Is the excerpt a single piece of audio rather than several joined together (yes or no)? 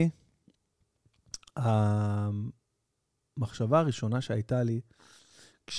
yes